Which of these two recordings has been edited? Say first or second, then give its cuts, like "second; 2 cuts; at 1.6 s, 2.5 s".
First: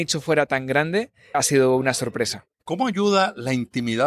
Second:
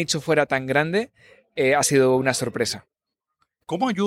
first; 2 cuts; at 1.3 s, 2.5 s